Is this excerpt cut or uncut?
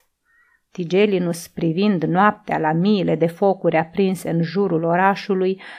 uncut